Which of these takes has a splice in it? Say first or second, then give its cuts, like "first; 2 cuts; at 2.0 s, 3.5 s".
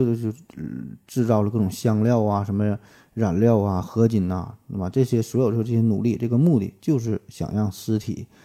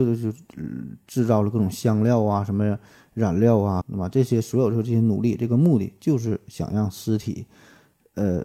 second; 1 cut; at 3.8 s